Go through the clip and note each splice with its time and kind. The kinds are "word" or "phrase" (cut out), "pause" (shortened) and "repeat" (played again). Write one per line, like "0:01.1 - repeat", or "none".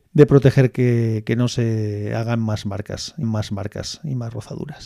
0:03.2 - repeat